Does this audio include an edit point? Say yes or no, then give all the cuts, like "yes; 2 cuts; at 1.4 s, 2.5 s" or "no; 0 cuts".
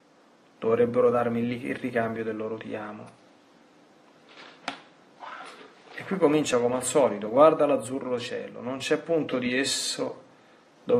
no; 0 cuts